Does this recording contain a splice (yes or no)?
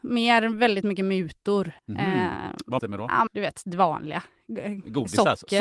yes